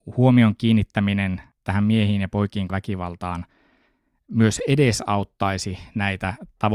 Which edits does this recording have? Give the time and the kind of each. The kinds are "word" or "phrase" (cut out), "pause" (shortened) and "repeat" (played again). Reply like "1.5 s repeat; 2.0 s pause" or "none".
2.7 s word